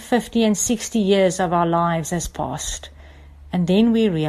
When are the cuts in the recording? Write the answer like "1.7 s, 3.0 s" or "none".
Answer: none